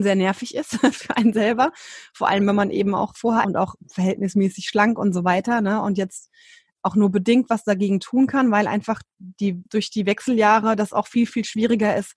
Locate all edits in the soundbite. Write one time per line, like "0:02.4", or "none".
0:03.4
0:06.7
0:09.7